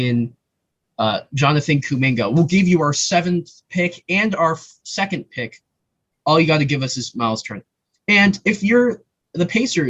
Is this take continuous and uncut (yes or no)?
yes